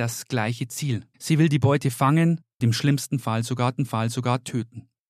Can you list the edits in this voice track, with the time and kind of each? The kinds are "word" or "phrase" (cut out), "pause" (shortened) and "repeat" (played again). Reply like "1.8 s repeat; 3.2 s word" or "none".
1.1 s pause; 2.6 s word; 3.8 s repeat